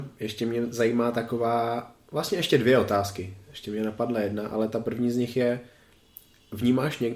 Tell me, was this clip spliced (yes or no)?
no